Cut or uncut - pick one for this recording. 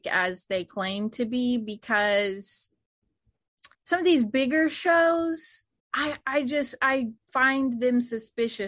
cut